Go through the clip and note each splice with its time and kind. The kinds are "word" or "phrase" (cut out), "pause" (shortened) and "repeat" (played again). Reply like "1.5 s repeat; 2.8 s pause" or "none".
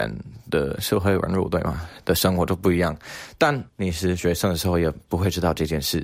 3.7 s pause